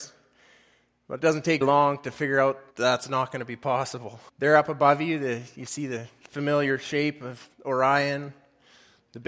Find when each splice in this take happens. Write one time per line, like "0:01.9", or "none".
0:01.6
0:02.7
0:04.3
0:07.5

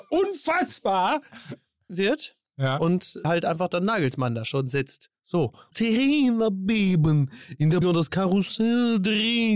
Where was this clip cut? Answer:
0:01.9
0:03.2
0:05.7
0:07.8

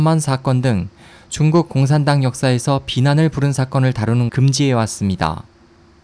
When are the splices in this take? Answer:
0:04.3

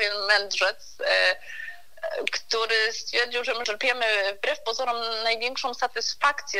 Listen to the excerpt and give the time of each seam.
0:03.6

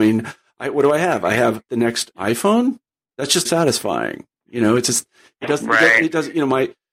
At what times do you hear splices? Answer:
0:01.7
0:02.1
0:02.9
0:03.4

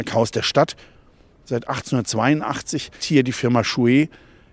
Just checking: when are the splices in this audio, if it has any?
0:03.0

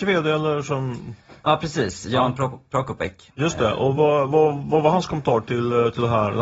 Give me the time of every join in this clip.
none

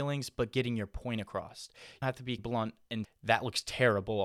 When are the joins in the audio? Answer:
0:02.0
0:02.4
0:03.0

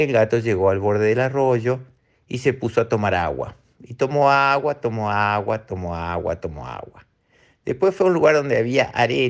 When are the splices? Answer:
none

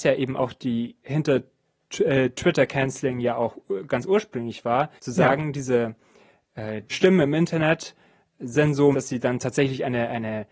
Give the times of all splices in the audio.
0:01.0
0:05.0
0:06.9
0:08.9

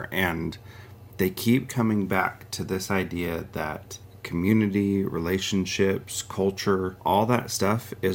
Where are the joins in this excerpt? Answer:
0:04.0
0:07.0

